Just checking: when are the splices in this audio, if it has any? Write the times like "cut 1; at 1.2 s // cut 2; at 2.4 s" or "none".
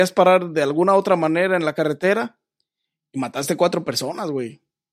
none